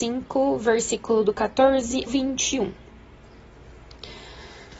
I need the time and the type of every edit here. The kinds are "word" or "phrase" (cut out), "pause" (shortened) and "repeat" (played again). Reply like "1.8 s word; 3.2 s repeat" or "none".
2.1 s word